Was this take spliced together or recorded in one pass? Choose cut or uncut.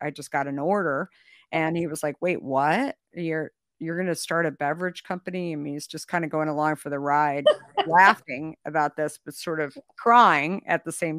uncut